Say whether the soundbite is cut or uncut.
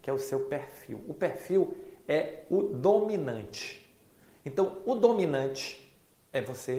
uncut